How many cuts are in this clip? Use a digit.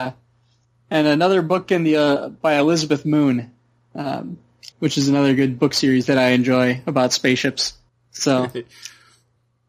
2